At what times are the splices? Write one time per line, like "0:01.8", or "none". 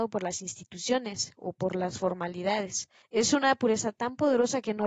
0:03.0